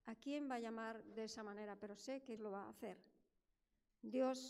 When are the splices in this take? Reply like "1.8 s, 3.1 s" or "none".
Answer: 1.1 s, 2.4 s